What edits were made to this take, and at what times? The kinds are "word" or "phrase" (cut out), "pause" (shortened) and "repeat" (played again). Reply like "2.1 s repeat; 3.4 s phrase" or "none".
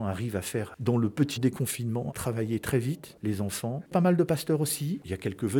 1.4 s word; 3.9 s phrase